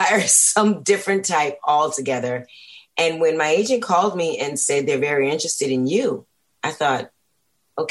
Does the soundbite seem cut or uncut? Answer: uncut